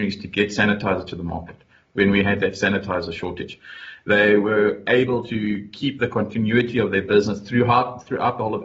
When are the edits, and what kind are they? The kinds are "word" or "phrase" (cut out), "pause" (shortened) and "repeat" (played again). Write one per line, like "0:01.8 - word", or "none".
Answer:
none